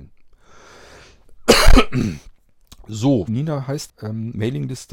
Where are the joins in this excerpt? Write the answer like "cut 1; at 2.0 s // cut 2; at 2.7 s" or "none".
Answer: cut 1; at 3.3 s // cut 2; at 3.9 s